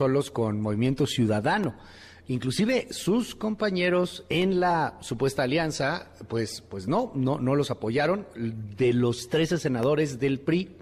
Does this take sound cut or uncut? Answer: uncut